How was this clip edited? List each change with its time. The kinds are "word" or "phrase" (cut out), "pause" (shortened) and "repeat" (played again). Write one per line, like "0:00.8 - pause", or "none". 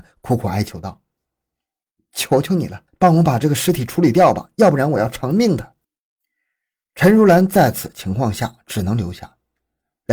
0:02.9 - pause
0:05.8 - pause